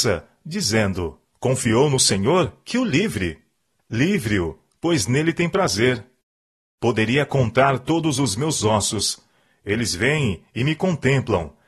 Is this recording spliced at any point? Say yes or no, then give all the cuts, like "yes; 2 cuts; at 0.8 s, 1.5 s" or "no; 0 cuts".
no; 0 cuts